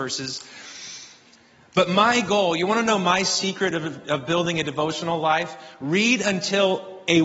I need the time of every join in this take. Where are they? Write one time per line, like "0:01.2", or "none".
none